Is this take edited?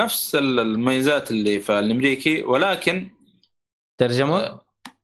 no; 0 cuts

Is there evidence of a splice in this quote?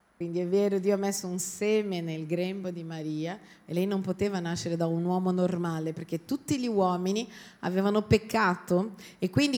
no; 0 cuts

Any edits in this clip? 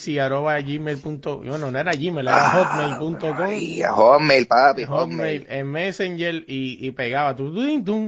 no; 0 cuts

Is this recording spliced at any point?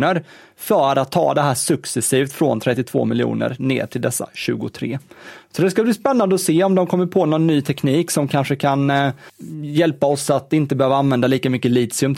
no; 0 cuts

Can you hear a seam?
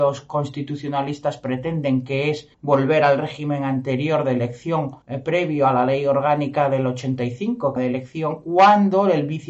yes; 3 cuts; at 2.5 s, 5.0 s, 7.8 s

